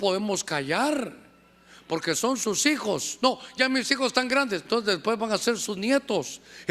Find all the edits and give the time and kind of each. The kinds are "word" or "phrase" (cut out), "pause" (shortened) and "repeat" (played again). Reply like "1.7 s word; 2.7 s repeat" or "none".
4.6 s word

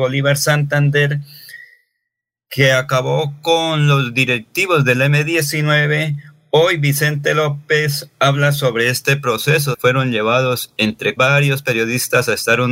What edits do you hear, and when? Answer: 9.7 s word; 11.2 s word

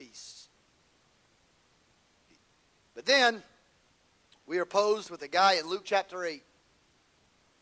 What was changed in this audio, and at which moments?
none

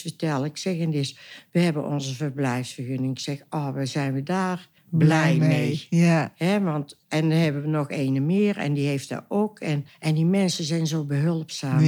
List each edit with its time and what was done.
4.8 s pause; 9.9 s pause

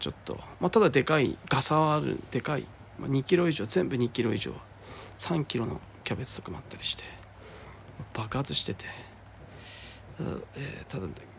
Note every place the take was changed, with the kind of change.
1.4 s pause; 2.9 s pause

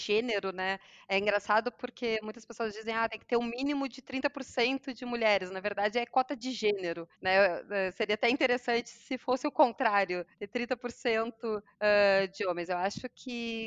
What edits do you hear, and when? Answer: 7.1 s pause; 10.3 s pause; 11.7 s pause

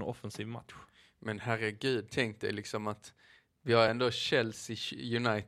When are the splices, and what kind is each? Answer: none

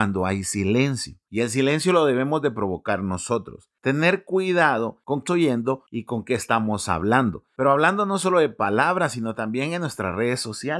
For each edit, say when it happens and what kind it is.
5.3 s word

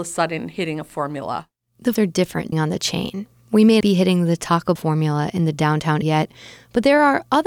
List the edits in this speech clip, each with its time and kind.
2.0 s word; 2.5 s word; 3.8 s word; 4.8 s word; 6.0 s word

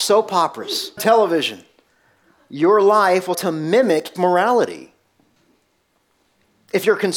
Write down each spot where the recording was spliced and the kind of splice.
1.0 s word; 3.3 s word; 4.1 s word

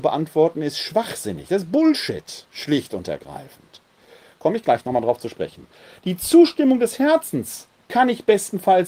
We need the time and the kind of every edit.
none

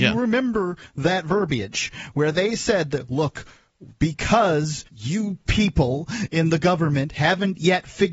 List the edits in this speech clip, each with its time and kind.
4.9 s pause

